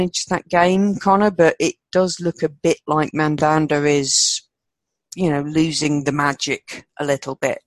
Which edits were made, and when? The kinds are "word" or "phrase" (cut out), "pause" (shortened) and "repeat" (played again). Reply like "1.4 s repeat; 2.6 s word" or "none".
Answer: none